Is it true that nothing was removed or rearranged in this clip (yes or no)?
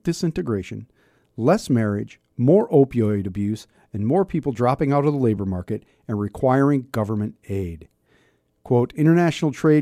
yes